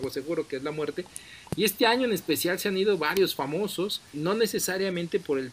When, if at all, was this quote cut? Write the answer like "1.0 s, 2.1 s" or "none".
4.1 s

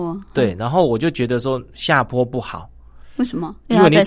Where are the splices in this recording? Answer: none

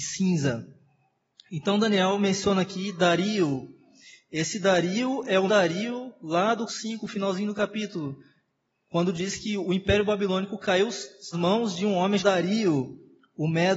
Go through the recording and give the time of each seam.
5.5 s, 6.7 s, 11.3 s, 12.2 s

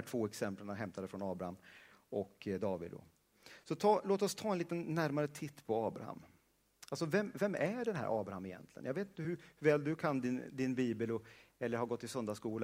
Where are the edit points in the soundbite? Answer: none

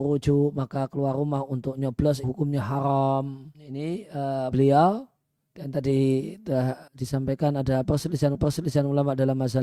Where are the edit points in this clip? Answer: 2.2 s, 3.5 s, 4.5 s, 6.9 s, 8.3 s

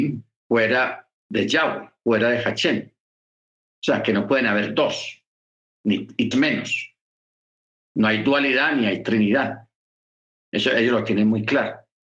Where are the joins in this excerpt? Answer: 6.3 s

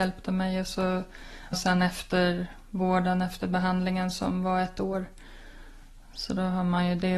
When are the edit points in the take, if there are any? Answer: 1.5 s

